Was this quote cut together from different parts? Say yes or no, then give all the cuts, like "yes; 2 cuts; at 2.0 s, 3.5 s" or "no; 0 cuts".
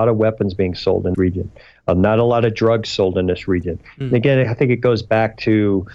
yes; 1 cut; at 1.1 s